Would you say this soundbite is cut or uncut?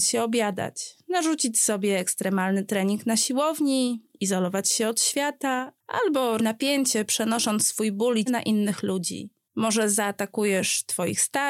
cut